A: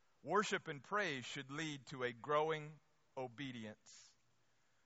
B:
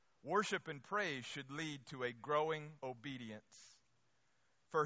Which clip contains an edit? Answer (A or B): B